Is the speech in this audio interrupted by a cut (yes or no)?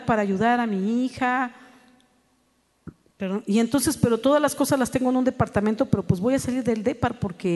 no